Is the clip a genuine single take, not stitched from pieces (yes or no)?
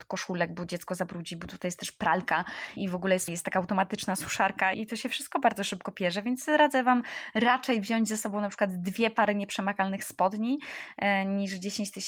no